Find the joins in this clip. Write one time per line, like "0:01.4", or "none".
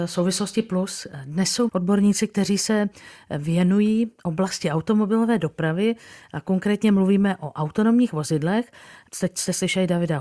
0:01.7